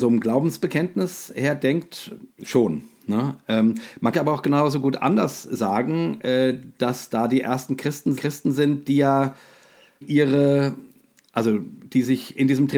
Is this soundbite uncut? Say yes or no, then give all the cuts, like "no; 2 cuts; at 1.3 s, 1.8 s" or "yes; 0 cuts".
no; 4 cuts; at 2.3 s, 4.1 s, 8.2 s, 10.0 s